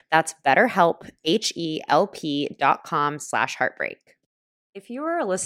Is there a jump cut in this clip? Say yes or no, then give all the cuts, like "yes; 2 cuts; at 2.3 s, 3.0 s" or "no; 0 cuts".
no; 0 cuts